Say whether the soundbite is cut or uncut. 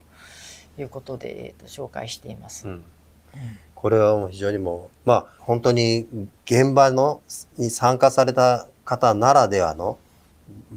cut